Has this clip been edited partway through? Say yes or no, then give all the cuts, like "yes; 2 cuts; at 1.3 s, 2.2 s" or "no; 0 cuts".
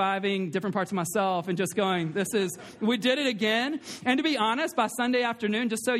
no; 0 cuts